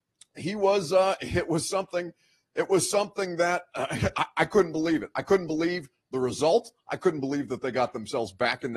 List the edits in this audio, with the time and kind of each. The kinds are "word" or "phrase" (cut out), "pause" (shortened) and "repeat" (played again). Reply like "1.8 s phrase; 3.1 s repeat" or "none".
none